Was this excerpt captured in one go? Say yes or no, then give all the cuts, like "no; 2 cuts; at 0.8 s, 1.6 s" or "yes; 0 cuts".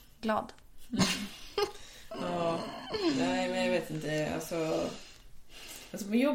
yes; 0 cuts